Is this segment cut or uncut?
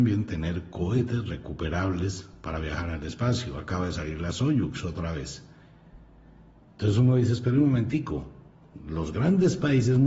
uncut